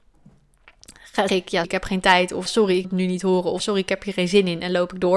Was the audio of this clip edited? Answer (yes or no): yes